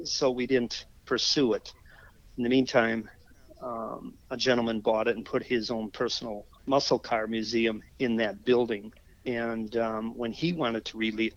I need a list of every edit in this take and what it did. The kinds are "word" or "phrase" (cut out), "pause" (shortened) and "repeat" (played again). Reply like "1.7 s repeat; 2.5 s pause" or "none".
6.6 s word; 7.9 s pause; 9.1 s pause